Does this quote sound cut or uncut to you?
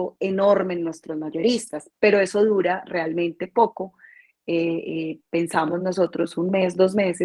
uncut